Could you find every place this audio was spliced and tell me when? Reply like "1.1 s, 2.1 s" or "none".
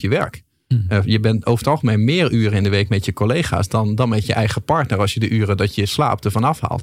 none